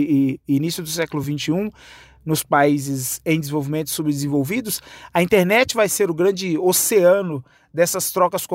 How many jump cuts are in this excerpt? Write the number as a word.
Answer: zero